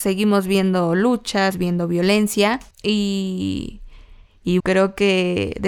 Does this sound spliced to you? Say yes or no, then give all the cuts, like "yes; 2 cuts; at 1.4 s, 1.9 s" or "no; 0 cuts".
yes; 3 cuts; at 1.5 s, 2.7 s, 4.6 s